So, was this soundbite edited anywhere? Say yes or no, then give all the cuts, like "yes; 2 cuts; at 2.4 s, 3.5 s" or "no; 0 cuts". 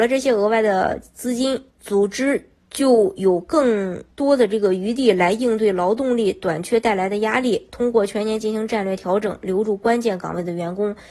yes; 2 cuts; at 1.7 s, 4.1 s